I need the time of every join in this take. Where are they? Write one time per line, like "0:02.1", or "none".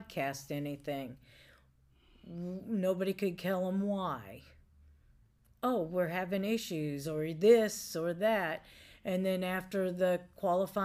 none

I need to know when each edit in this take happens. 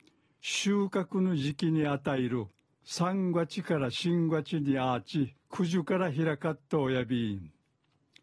0:02.7
0:05.4

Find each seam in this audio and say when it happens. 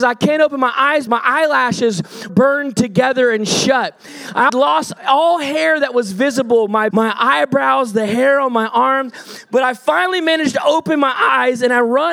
0:01.1
0:02.3
0:04.5
0:06.9

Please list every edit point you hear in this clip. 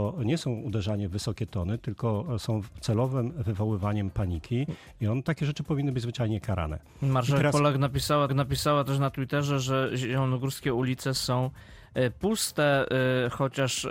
0:08.3

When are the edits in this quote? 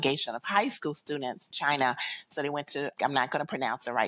0:01.5
0:03.0

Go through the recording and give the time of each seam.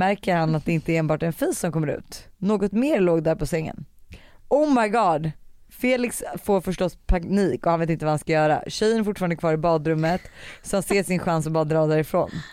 0:02.3

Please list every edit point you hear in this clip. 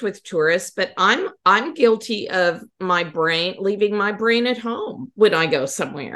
none

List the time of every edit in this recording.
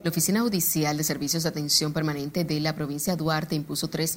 none

